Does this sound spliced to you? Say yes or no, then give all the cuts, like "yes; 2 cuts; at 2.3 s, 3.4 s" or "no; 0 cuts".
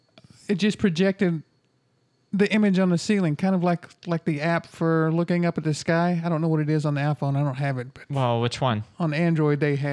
no; 0 cuts